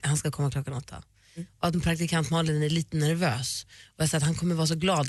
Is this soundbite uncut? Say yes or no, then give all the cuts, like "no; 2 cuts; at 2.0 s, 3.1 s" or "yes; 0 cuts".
yes; 0 cuts